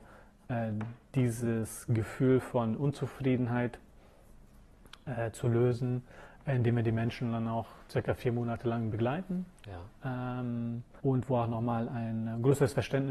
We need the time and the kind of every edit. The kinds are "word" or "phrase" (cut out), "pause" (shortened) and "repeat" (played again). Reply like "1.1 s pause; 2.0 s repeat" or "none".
9.5 s pause; 11.0 s pause